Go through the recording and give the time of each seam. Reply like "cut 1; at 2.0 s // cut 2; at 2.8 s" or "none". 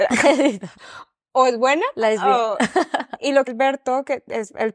cut 1; at 3.5 s